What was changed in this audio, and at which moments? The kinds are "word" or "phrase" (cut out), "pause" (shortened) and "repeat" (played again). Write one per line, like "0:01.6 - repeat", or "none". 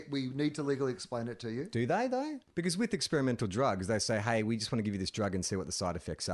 0:02.5 - pause